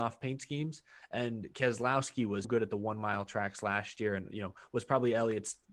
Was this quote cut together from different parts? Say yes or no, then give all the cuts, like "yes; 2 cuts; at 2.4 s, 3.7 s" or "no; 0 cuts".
yes; 1 cut; at 2.4 s